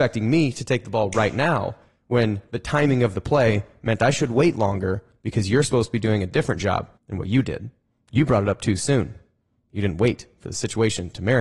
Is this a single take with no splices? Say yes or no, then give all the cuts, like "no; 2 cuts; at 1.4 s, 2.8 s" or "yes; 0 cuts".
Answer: no; 1 cut; at 7.0 s